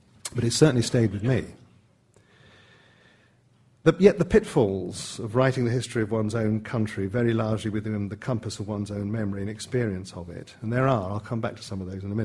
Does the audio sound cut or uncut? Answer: uncut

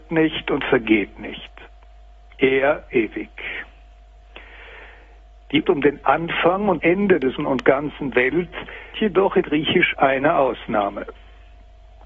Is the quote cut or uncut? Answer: cut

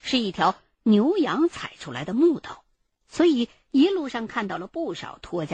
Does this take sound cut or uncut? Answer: cut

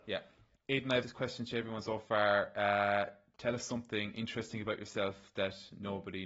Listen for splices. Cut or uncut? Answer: cut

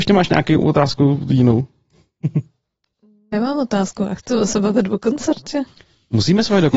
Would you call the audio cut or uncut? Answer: uncut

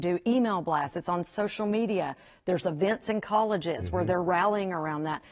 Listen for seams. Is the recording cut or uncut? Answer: uncut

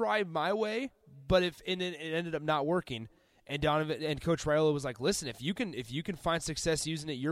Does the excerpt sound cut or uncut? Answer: uncut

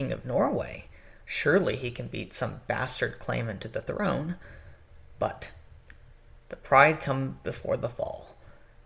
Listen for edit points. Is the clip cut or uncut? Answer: cut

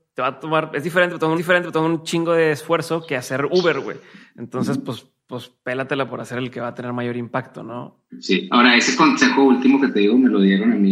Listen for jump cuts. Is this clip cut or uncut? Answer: cut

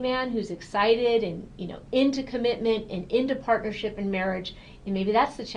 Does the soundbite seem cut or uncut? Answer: uncut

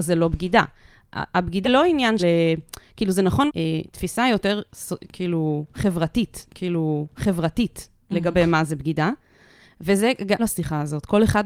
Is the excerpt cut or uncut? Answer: cut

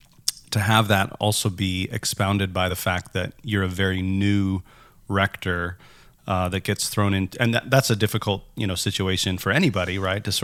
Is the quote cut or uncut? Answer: uncut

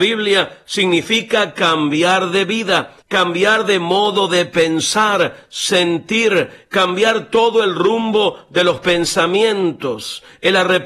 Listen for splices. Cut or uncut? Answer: cut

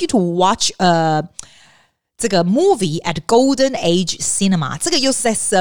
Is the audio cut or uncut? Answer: uncut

